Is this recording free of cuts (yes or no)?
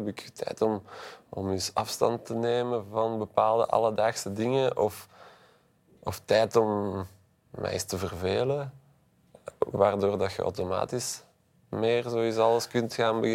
yes